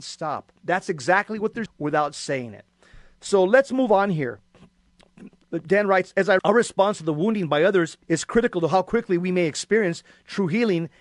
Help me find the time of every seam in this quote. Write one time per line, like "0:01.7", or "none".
0:01.7
0:06.4
0:08.0